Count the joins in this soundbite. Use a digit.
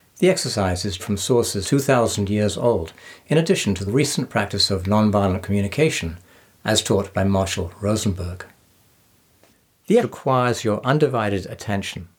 4